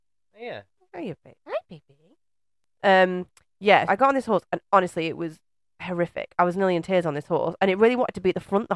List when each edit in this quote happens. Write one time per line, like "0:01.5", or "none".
0:03.9

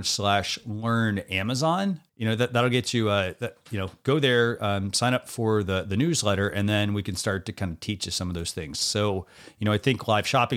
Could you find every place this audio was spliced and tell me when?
0:02.1

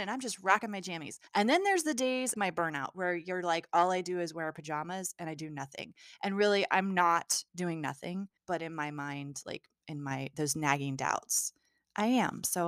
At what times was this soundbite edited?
0:01.3
0:02.3
0:07.5
0:08.4

